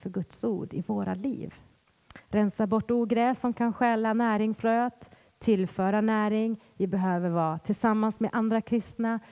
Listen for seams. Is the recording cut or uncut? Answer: cut